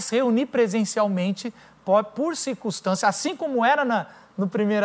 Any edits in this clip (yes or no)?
no